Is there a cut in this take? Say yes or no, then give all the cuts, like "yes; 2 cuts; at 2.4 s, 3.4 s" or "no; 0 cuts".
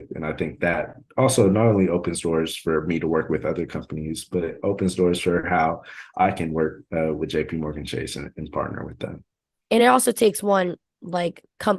no; 0 cuts